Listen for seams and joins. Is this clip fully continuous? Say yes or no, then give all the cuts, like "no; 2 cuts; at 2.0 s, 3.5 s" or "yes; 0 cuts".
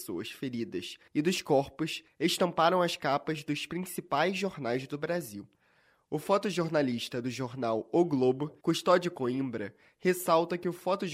no; 1 cut; at 8.6 s